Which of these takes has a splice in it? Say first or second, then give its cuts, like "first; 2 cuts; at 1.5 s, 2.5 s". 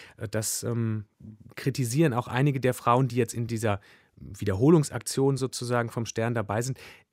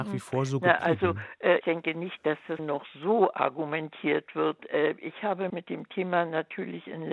second; 3 cuts; at 1.6 s, 2.6 s, 5.5 s